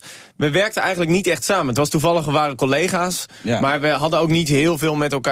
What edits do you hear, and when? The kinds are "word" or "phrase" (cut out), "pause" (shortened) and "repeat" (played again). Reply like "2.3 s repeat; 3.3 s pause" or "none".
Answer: none

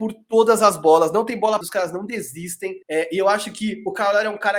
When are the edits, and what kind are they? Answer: 1.6 s word; 2.8 s pause

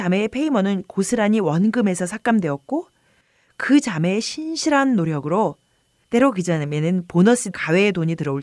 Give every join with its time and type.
7.5 s word

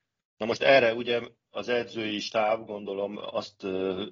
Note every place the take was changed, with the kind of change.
none

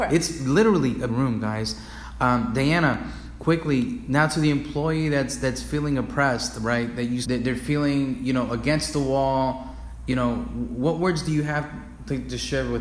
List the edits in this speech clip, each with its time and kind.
1.1 s phrase; 7.2 s phrase

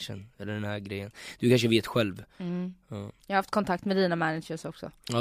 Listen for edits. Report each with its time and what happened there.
2.3 s pause; 3.2 s pause

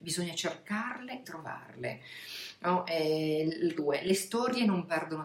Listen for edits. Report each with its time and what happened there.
1.2 s word; 3.8 s word

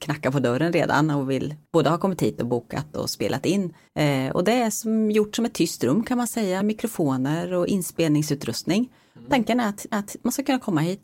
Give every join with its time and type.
1.7 s pause; 3.9 s pause; 6.6 s word; 9.9 s repeat

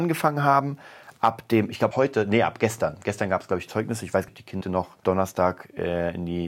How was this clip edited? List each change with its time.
1.9 s word; 4.3 s word; 4.6 s word; 5.0 s word

